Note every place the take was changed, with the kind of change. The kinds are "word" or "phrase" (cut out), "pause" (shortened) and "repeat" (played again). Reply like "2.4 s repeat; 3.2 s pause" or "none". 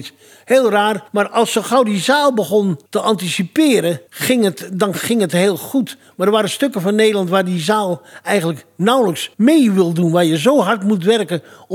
1.1 s pause; 2.9 s pause; 4.1 s pause; 9.3 s pause